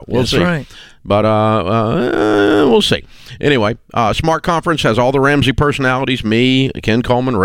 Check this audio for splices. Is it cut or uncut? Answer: uncut